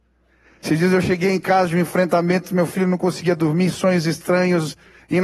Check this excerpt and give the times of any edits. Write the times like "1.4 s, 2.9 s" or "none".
none